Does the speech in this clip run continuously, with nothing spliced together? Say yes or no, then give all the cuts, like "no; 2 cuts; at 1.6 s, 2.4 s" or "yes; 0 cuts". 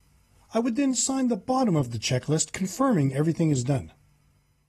yes; 0 cuts